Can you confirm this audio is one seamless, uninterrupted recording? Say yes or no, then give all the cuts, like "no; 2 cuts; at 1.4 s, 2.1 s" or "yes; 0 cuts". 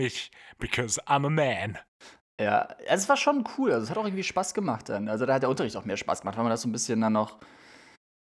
yes; 0 cuts